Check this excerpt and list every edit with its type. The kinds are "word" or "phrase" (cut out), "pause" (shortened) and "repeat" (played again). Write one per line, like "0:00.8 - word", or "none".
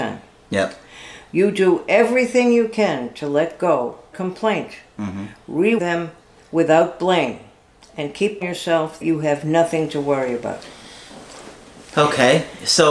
0:04.1 - word
0:05.8 - word
0:08.4 - word
0:09.0 - word